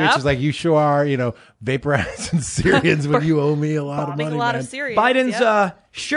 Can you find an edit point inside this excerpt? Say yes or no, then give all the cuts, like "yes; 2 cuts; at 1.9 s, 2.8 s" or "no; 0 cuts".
no; 0 cuts